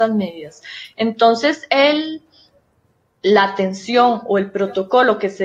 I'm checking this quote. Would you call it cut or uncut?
uncut